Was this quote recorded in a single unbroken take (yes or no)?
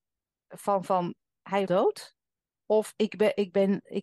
no